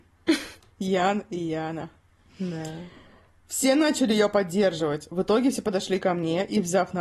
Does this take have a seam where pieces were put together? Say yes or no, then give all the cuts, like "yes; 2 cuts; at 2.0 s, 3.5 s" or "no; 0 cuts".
no; 0 cuts